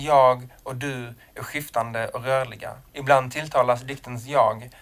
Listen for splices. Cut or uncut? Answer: cut